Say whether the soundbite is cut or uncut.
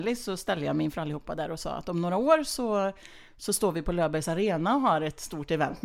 uncut